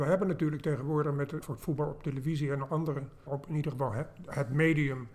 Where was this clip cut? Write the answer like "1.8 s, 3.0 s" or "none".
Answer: 1.4 s, 3.3 s